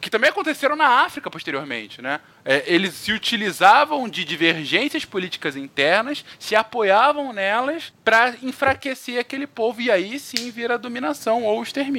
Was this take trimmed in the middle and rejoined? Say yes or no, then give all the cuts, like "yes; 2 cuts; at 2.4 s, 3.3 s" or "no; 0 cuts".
no; 0 cuts